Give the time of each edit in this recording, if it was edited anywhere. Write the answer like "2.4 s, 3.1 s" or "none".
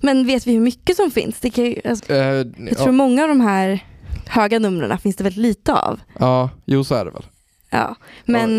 2.0 s

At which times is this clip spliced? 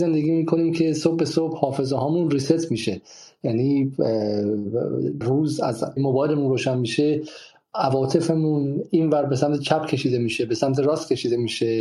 5.2 s, 6.0 s

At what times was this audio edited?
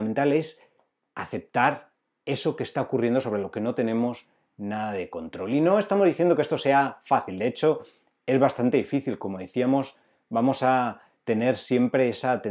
none

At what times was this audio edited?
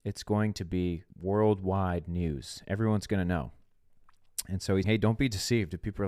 1.1 s, 4.8 s

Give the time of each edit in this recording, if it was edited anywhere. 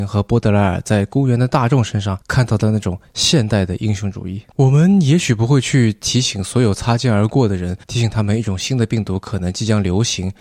2.2 s, 4.5 s, 7.8 s

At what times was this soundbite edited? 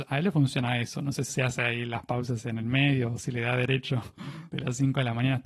1.3 s

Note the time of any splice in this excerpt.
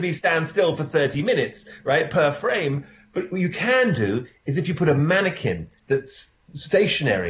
none

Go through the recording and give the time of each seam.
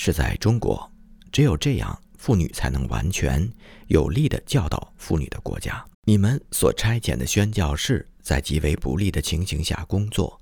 5.9 s

